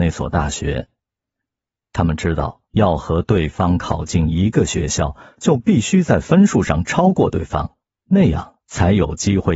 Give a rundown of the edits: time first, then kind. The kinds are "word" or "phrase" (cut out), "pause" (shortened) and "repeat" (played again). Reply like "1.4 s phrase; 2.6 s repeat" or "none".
2.6 s pause; 7.8 s pause; 8.6 s pause